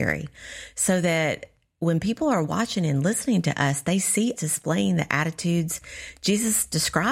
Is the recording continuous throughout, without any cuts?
no; 1 cut; at 4.4 s

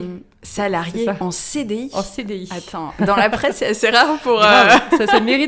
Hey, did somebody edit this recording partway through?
no; 0 cuts

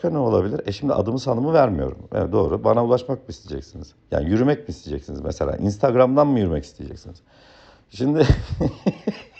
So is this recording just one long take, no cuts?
yes; 0 cuts

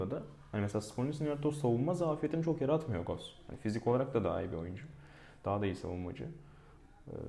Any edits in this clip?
no; 0 cuts

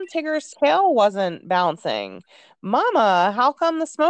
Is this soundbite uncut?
yes; 0 cuts

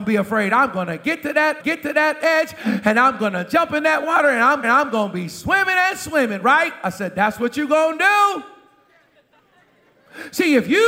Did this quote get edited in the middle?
yes; 2 cuts; at 1.6 s, 4.6 s

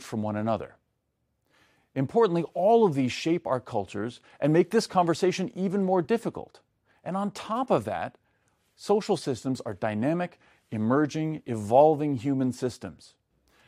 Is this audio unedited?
yes; 0 cuts

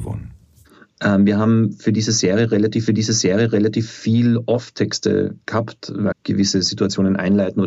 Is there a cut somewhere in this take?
yes; 2 cuts; at 2.9 s, 6.1 s

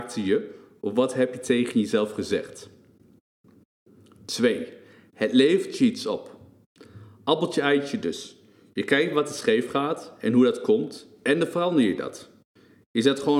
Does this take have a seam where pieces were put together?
no; 0 cuts

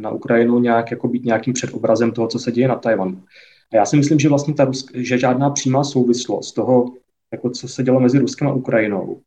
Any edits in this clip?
no; 0 cuts

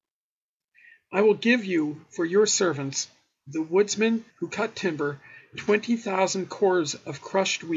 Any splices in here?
yes; 1 cut; at 4.3 s

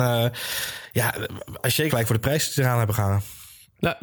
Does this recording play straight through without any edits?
no; 1 cut; at 1.9 s

